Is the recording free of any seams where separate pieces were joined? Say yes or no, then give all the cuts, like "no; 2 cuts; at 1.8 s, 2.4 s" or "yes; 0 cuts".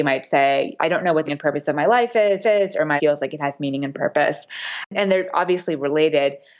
no; 3 cuts; at 1.3 s, 2.4 s, 3.0 s